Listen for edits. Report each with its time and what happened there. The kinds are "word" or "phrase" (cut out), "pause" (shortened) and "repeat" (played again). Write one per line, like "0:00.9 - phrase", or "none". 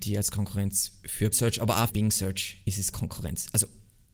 0:01.3 - word
0:01.9 - word
0:02.9 - word